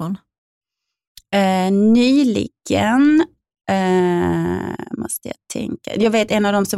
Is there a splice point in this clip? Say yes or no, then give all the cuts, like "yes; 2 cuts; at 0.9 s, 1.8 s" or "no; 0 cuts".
no; 0 cuts